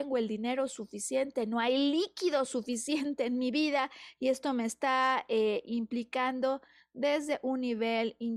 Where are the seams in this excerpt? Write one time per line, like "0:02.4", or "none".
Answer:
none

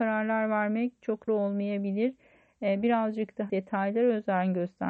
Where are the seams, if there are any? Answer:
0:01.3
0:03.5

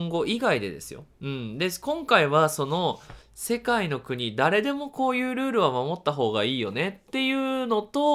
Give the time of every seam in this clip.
0:01.1
0:03.2

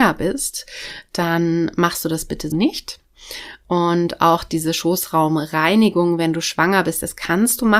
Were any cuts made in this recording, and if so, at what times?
0:02.5

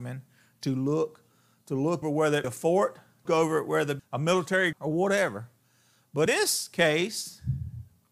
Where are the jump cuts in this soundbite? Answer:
0:02.0
0:02.4
0:03.3
0:04.0
0:04.7
0:06.3

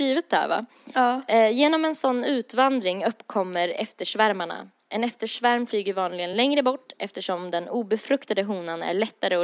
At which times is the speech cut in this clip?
none

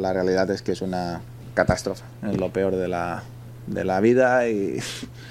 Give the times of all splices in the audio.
none

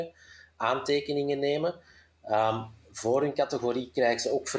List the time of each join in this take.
none

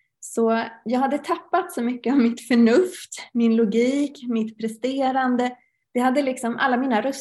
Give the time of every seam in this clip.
none

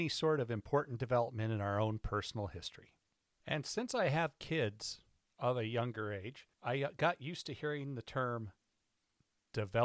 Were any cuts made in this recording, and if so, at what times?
0:06.5

